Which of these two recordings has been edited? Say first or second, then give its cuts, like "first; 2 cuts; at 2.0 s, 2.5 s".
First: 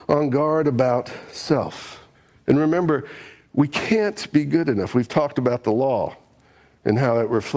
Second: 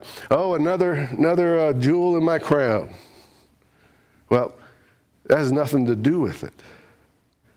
first; 1 cut; at 2.1 s